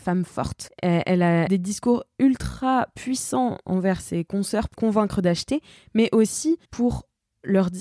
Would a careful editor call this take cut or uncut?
cut